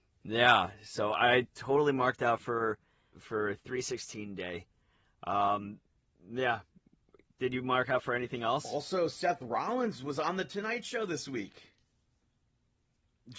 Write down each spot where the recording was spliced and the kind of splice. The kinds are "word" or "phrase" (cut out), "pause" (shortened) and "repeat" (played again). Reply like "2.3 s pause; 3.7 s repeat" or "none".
3.1 s word